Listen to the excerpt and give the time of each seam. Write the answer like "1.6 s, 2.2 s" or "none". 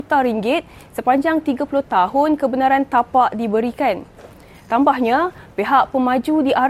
none